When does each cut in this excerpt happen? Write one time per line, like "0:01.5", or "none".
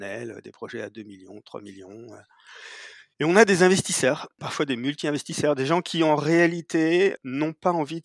0:03.1